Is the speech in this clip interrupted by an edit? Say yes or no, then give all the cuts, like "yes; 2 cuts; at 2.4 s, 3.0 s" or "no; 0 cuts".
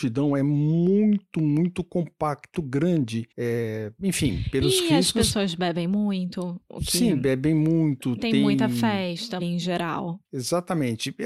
yes; 4 cuts; at 2.5 s, 3.3 s, 9.4 s, 10.2 s